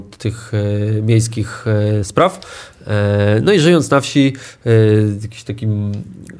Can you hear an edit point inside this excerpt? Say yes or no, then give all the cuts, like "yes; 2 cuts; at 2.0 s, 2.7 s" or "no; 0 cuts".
no; 0 cuts